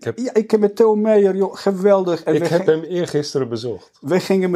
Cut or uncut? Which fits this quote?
uncut